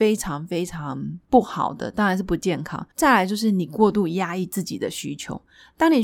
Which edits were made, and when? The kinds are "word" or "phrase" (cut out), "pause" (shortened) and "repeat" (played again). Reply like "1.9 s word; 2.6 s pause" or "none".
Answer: 2.9 s pause